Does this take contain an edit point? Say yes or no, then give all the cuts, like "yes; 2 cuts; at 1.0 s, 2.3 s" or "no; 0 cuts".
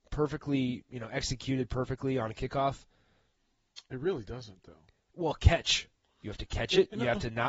no; 0 cuts